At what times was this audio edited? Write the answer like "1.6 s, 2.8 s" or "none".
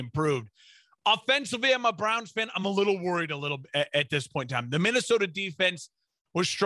none